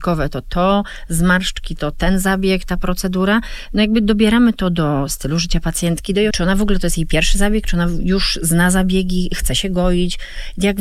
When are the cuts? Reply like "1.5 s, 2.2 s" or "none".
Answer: 6.3 s